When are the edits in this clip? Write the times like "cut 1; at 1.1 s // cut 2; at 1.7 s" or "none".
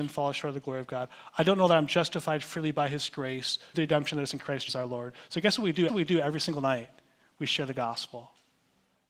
cut 1; at 3.7 s // cut 2; at 4.7 s // cut 3; at 5.9 s